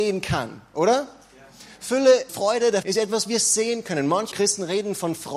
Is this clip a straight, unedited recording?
no; 4 cuts; at 2.3 s, 2.8 s, 3.2 s, 4.3 s

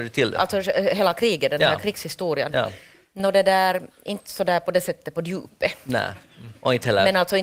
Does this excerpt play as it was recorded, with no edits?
yes; 0 cuts

